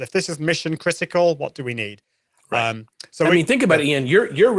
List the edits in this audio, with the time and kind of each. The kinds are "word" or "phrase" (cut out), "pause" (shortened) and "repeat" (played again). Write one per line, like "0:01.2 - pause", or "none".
none

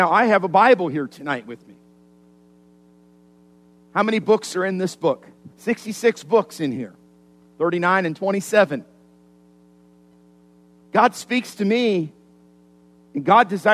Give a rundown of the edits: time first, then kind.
0:05.5 - pause

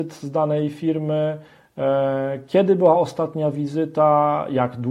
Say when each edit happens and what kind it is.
none

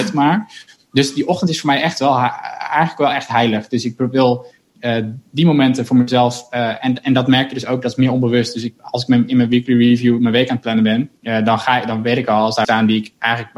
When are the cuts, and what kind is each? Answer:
0:11.2 - pause
0:12.6 - word

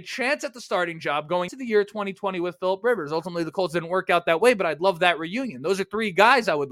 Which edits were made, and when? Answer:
0:01.5 - word

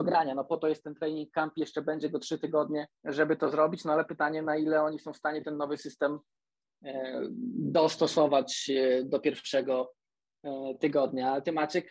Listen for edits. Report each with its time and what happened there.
0:03.0 - pause

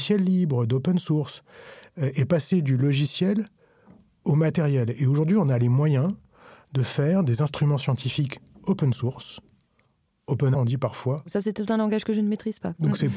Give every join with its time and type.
0:10.5 - word

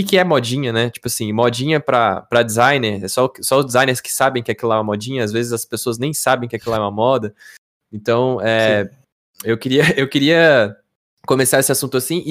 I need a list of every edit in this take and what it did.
none

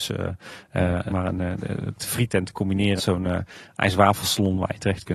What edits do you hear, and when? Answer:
0:01.1 - word
0:02.0 - word
0:03.0 - word

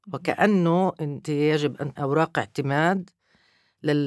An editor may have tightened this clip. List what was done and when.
0:01.2 - word
0:02.0 - word

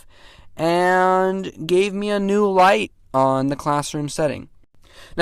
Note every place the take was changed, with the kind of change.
none

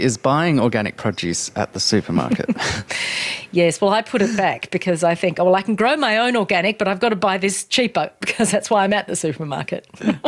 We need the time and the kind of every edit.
none

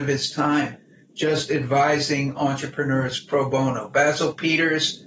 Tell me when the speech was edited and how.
0:02.4 - word

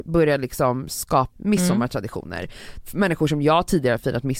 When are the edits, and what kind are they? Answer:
0:01.4 - word

